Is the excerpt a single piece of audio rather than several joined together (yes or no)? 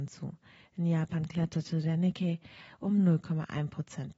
yes